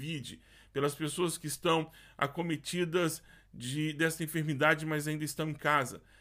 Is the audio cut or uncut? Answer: uncut